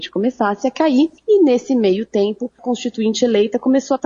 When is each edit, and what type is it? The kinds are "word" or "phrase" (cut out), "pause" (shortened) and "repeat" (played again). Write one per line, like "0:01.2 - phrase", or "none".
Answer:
0:01.2 - pause
0:02.6 - word